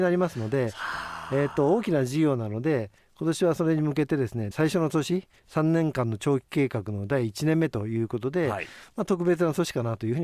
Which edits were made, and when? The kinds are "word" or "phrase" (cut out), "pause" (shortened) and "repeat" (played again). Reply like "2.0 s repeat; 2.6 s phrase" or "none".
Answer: 5.4 s pause

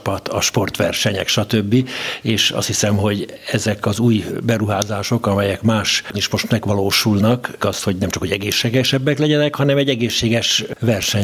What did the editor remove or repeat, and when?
6.1 s word; 7.6 s word

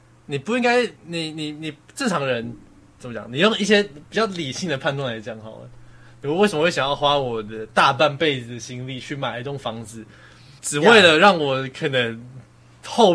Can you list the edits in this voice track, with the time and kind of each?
1.0 s pause; 10.6 s pause

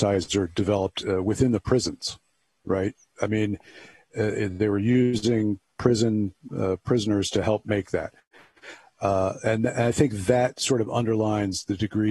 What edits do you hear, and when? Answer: none

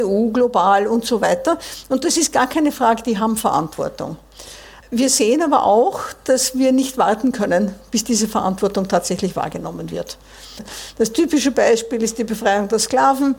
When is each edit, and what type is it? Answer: none

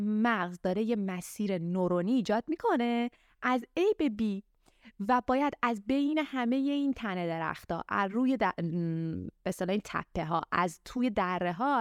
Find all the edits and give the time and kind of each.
none

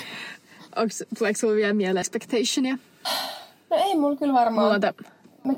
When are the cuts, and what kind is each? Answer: 2.0 s word

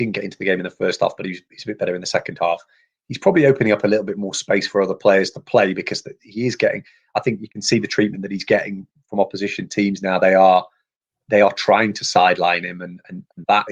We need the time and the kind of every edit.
none

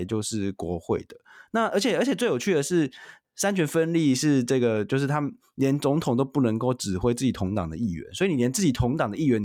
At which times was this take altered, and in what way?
none

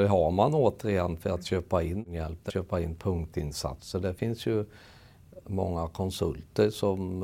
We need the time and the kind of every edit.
2.5 s phrase; 5.4 s word

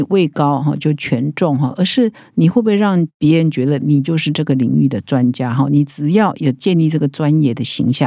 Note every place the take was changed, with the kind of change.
none

